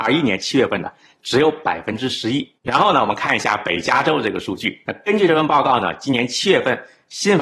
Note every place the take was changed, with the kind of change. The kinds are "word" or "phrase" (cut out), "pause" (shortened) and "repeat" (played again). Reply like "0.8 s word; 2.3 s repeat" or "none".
2.6 s pause